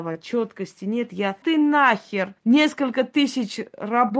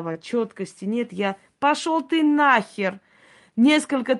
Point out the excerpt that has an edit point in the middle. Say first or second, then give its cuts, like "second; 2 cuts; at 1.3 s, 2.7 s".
first; 2 cuts; at 1.4 s, 2.4 s